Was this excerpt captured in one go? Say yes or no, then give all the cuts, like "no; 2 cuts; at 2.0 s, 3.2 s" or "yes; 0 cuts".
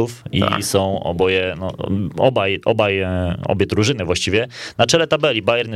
yes; 0 cuts